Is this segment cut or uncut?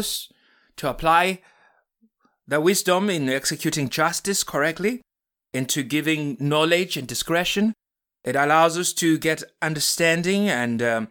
uncut